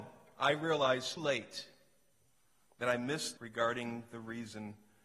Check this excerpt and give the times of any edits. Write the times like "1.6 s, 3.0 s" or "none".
1.2 s, 3.4 s